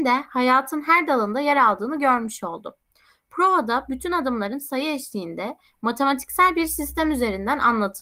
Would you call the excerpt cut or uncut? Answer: uncut